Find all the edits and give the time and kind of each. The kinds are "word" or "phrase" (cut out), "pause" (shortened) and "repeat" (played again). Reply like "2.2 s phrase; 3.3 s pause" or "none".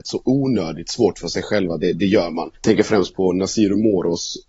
2.5 s pause